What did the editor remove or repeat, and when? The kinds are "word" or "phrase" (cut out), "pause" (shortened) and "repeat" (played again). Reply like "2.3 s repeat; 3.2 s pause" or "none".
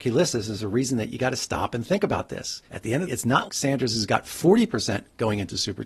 2.7 s pause; 3.0 s phrase; 3.5 s word